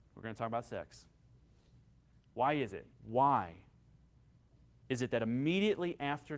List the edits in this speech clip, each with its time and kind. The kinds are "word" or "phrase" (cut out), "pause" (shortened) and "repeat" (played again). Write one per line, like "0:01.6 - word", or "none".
0:02.9 - pause